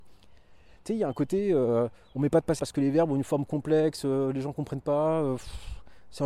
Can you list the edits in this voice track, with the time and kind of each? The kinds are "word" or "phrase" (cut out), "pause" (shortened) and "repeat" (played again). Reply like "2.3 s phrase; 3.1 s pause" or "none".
2.6 s word